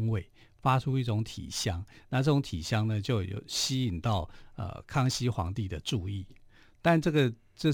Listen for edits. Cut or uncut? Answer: uncut